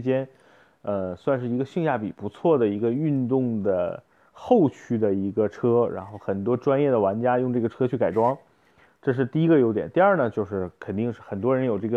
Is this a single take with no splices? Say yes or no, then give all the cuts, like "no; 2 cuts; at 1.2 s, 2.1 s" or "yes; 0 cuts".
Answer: yes; 0 cuts